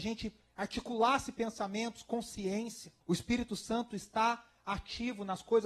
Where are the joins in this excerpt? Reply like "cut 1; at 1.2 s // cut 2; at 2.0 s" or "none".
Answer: cut 1; at 3.0 s

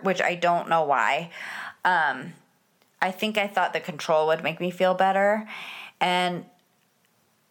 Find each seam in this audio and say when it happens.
none

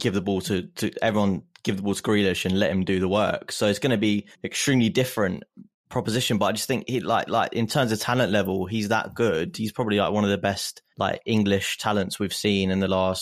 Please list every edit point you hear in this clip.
cut 1; at 4.3 s // cut 2; at 7.3 s // cut 3; at 10.9 s

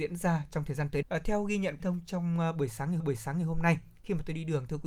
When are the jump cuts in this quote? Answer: cut 1; at 1.0 s // cut 2; at 1.8 s // cut 3; at 3.0 s

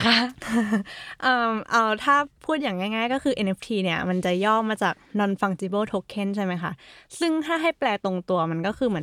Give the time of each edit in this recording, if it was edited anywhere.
none

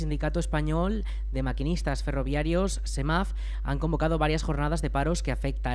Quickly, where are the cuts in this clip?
none

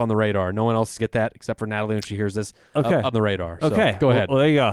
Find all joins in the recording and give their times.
cut 1; at 1.0 s // cut 2; at 3.1 s

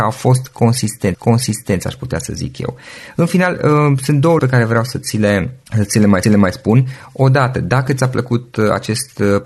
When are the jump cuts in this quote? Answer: cut 1; at 1.1 s // cut 2; at 4.4 s // cut 3; at 5.7 s // cut 4; at 6.2 s

